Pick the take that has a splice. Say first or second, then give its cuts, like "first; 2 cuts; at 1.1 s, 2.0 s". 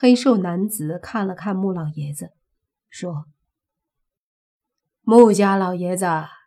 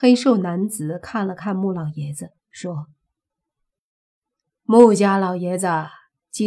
second; 1 cut; at 2.4 s